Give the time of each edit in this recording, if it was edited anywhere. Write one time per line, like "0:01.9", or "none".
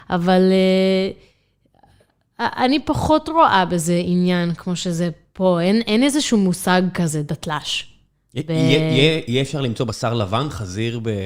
none